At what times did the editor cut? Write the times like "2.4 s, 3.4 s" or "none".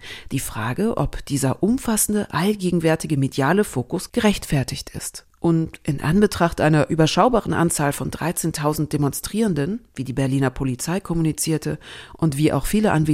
none